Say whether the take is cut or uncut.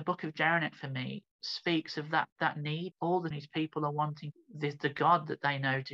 cut